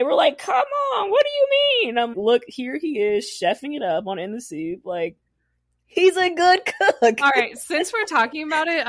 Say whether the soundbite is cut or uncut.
cut